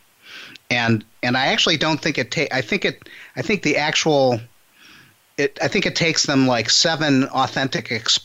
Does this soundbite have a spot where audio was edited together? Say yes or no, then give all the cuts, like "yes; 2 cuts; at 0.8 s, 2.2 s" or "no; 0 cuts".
yes; 1 cut; at 5.6 s